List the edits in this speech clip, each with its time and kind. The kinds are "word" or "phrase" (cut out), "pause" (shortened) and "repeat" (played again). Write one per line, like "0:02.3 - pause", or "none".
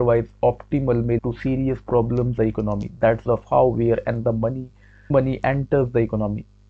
0:01.2 - word
0:02.4 - word
0:03.3 - word
0:04.2 - word
0:05.1 - word